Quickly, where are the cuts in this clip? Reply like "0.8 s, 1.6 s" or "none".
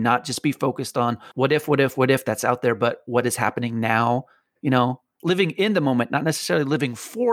1.3 s